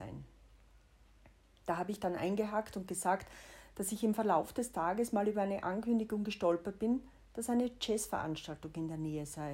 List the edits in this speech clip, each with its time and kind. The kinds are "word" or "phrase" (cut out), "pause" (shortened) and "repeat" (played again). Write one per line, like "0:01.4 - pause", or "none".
none